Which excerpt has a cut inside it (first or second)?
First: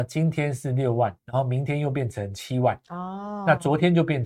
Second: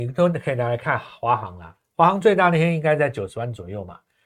first